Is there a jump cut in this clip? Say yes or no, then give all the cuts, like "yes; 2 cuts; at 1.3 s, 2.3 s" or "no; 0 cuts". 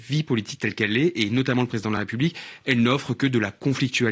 no; 0 cuts